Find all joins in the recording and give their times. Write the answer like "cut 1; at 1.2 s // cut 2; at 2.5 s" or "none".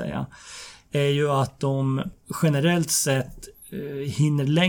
none